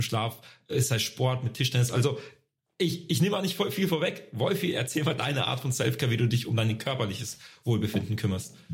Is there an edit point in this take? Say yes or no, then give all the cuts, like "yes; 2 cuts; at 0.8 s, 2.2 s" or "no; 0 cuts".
no; 0 cuts